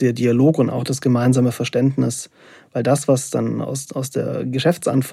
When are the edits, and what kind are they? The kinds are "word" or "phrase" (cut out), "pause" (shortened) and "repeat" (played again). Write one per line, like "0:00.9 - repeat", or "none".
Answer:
none